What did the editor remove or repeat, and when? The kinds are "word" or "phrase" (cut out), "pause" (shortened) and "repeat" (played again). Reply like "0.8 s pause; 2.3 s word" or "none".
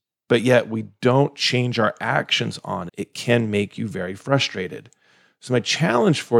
2.9 s word